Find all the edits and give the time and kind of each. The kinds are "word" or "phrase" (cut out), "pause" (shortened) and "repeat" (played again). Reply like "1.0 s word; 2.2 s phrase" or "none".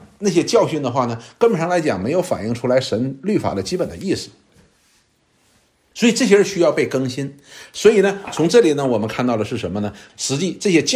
none